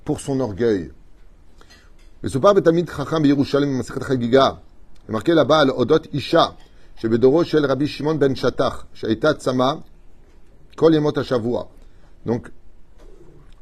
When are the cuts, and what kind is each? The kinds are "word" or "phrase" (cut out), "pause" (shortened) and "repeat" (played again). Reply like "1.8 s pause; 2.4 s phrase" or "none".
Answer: none